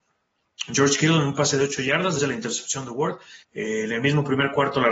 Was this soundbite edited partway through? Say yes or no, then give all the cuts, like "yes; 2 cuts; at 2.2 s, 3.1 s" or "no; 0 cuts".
yes; 2 cuts; at 2.2 s, 3.4 s